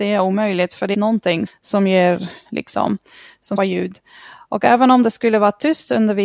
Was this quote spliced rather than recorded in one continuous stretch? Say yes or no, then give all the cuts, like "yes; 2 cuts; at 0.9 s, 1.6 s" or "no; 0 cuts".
yes; 4 cuts; at 0.9 s, 1.5 s, 2.5 s, 3.6 s